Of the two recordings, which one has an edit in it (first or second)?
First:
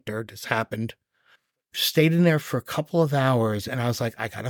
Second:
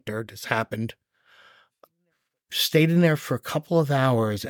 first